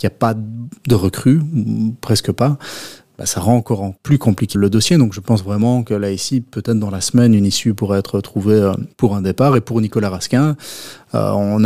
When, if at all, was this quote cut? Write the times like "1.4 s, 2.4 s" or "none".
4.0 s, 4.5 s, 8.9 s